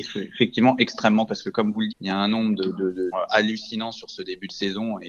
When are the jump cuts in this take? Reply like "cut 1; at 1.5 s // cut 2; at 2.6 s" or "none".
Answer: cut 1; at 1.3 s // cut 2; at 1.9 s // cut 3; at 3.1 s

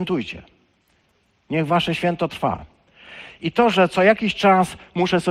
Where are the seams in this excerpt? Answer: none

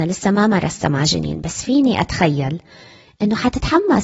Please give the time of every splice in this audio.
none

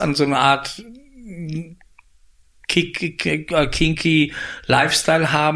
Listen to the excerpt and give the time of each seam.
none

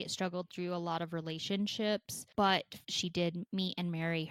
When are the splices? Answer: cut 1; at 2.8 s

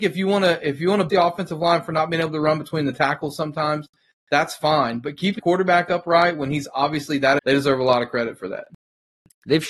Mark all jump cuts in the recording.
cut 1; at 1.1 s // cut 2; at 5.4 s // cut 3; at 7.4 s

